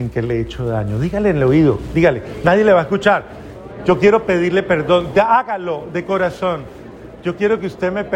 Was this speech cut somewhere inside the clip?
no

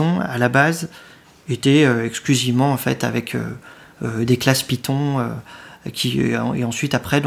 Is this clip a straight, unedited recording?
yes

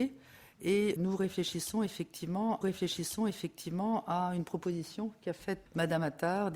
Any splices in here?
yes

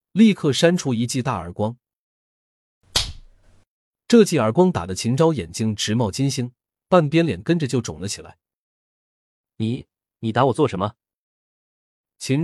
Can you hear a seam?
no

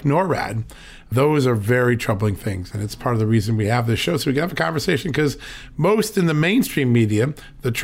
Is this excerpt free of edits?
yes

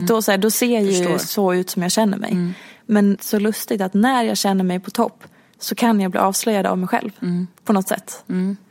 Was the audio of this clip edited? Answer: yes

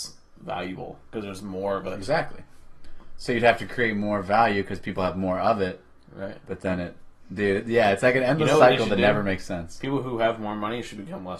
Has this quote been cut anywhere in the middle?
no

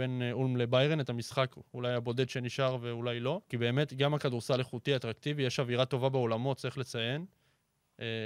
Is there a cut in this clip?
yes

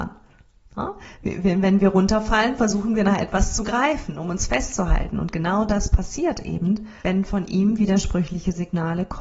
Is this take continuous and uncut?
no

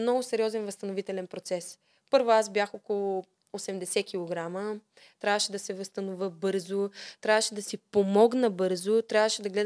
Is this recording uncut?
yes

